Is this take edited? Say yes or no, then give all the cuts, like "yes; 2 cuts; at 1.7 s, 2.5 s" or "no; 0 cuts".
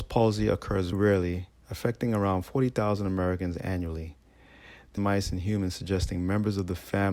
yes; 2 cuts; at 0.9 s, 5.0 s